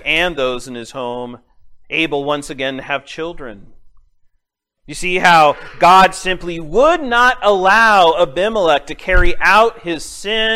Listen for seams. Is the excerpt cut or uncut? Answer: uncut